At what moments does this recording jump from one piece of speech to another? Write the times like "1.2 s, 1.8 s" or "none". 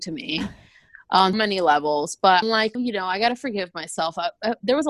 1.3 s, 2.4 s, 2.7 s